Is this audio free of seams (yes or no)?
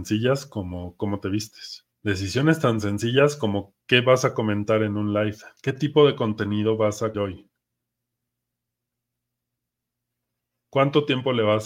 no